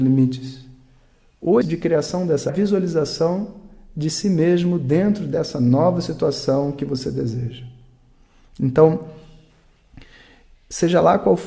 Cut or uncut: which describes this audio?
cut